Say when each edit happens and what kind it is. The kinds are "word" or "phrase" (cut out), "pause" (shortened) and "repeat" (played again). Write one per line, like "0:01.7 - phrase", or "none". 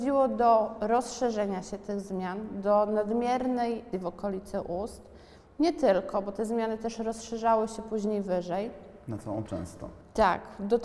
0:03.9 - word
0:09.5 - word